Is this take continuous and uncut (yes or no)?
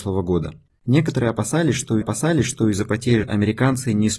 no